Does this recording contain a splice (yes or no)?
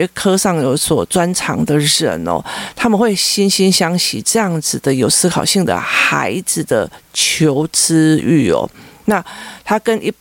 no